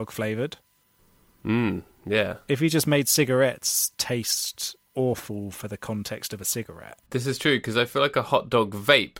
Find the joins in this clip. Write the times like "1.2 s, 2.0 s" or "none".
4.9 s, 7.0 s